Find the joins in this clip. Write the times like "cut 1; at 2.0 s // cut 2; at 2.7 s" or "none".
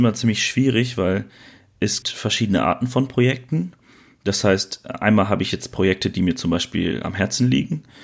cut 1; at 2.0 s

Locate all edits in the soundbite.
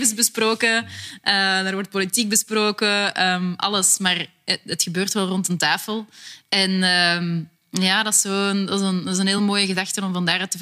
none

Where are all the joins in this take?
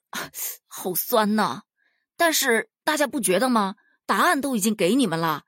none

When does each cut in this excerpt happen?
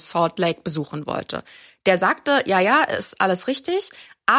none

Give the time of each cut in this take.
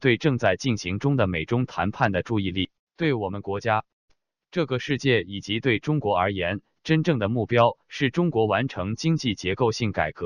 cut 1; at 2.9 s

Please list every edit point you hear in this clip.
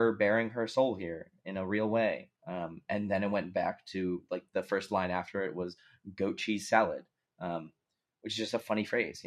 cut 1; at 2.4 s

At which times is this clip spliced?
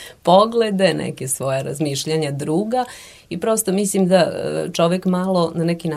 none

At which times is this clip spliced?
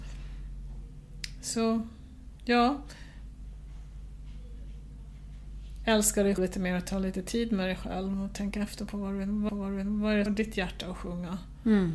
cut 1; at 6.4 s // cut 2; at 9.5 s // cut 3; at 10.3 s

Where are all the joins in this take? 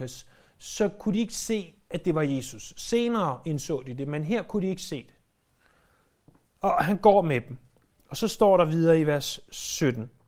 none

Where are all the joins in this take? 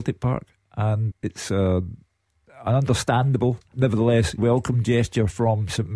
cut 1; at 1.1 s // cut 2; at 3.7 s // cut 3; at 4.4 s

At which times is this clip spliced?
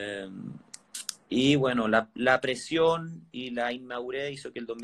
none

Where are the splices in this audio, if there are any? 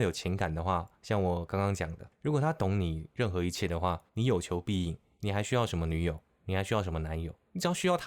cut 1; at 2.1 s // cut 2; at 4.1 s

